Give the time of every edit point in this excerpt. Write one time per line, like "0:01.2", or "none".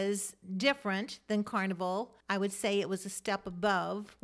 0:02.2

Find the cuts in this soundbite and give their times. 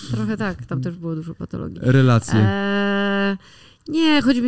none

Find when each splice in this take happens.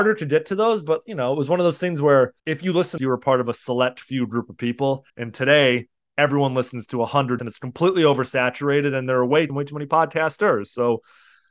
0:02.4
0:03.0
0:05.1
0:07.4
0:09.5

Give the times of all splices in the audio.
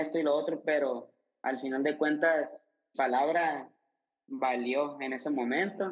0:02.9

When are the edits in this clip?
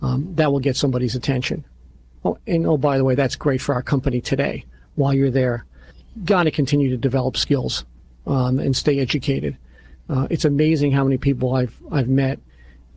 none

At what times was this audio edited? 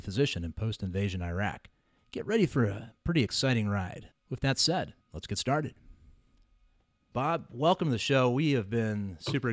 0:02.0
0:04.1
0:05.0
0:06.8

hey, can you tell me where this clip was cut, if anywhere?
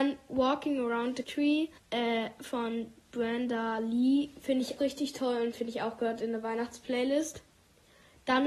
0:01.2
0:01.8
0:04.8

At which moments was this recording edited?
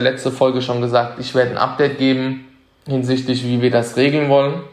none

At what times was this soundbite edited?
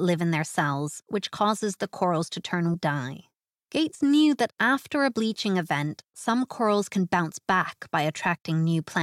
0:02.7
0:03.3

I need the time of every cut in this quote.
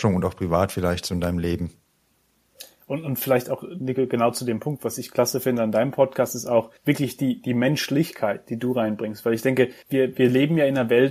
0:06.8
0:09.8

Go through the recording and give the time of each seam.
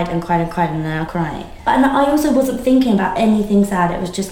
0:01.1

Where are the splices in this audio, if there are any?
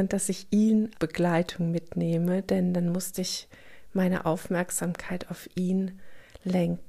0:00.9

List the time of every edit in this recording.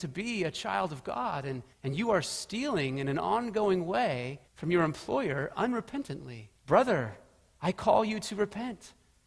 0:01.7
0:04.5
0:06.6

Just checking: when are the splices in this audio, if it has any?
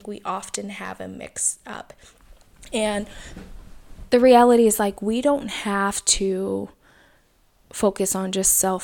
none

